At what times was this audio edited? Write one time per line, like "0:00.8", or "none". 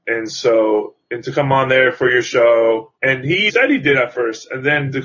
0:03.0
0:03.5